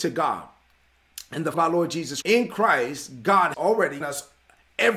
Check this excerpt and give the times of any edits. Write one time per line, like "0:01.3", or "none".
0:01.5
0:02.2
0:03.5
0:04.0